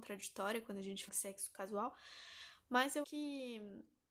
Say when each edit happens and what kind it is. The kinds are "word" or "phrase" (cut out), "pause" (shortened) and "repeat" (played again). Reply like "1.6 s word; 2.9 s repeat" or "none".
1.1 s word; 3.0 s word